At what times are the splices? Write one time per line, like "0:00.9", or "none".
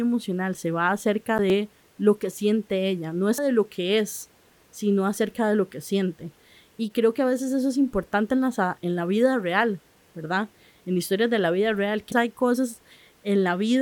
0:03.4
0:08.8
0:12.1